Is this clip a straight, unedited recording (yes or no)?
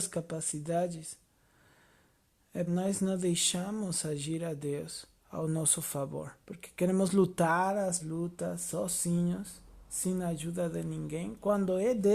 no